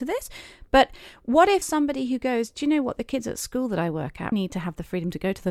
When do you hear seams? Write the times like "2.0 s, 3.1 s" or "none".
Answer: 1.6 s, 4.3 s